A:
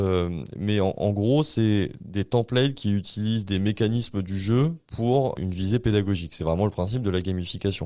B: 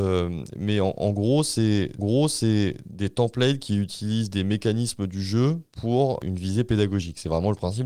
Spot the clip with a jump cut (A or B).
B